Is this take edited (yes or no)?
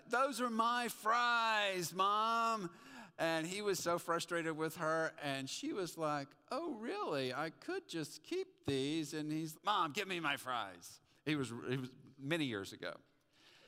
yes